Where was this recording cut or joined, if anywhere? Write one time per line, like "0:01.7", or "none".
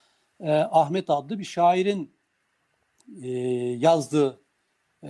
none